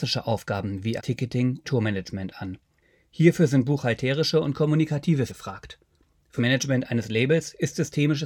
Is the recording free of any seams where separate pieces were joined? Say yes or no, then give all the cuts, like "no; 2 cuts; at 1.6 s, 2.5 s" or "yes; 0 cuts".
no; 4 cuts; at 1.0 s, 1.6 s, 5.3 s, 6.4 s